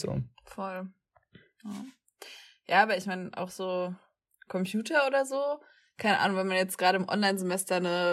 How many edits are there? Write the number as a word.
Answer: zero